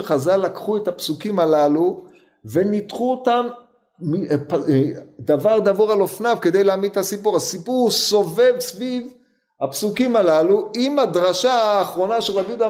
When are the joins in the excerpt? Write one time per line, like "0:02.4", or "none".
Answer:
none

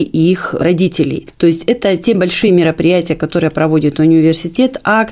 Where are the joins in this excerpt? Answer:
none

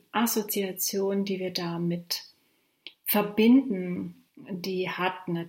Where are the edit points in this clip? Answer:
0:04.3

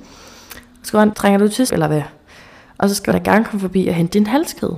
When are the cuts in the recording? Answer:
0:01.1
0:01.7
0:03.1

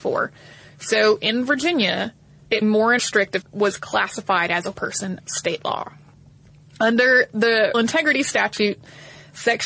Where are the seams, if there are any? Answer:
0:02.6
0:03.0
0:03.4
0:04.7
0:05.2
0:07.7

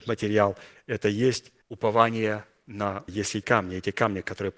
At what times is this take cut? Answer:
0:01.6
0:03.1
0:03.4

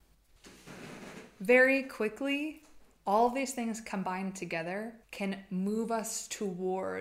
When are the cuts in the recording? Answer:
0:05.0

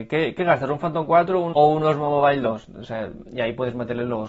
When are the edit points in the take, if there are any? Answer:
0:01.5

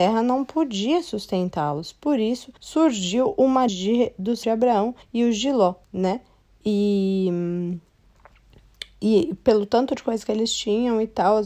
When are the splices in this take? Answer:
0:02.6
0:03.7
0:04.4
0:05.0
0:05.8
0:09.4

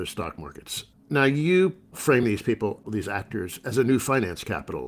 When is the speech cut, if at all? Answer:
none

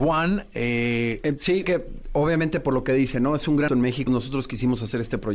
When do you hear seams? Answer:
0:01.6
0:03.7
0:04.1

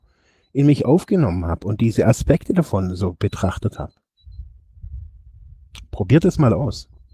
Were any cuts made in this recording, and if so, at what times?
none

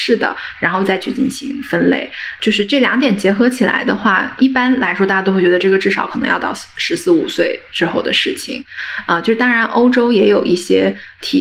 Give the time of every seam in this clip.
0:04.4

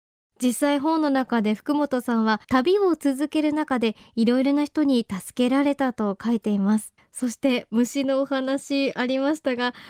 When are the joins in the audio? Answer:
0:02.4
0:07.0

